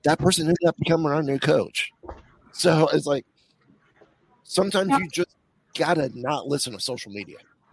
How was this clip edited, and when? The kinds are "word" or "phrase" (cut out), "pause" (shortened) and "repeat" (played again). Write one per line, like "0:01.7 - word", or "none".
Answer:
none